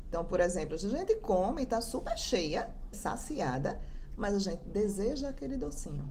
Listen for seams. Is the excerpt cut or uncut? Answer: cut